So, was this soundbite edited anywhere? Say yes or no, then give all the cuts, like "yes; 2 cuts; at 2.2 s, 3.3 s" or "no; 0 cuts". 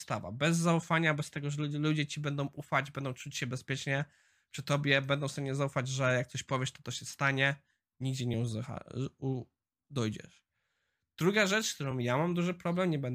no; 0 cuts